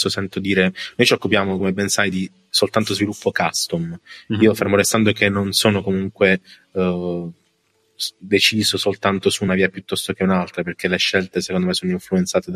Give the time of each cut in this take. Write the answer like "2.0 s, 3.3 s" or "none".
none